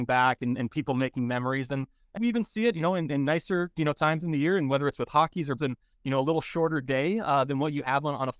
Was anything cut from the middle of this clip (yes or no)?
yes